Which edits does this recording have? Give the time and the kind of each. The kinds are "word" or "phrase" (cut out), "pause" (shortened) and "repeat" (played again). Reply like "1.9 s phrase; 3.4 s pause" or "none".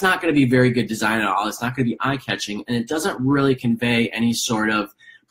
none